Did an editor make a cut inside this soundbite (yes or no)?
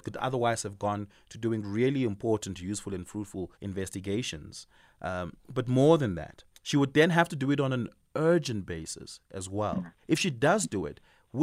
yes